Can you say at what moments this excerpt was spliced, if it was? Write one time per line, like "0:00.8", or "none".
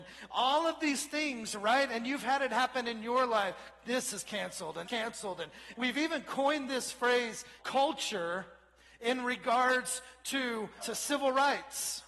0:04.8
0:05.7
0:07.6
0:10.8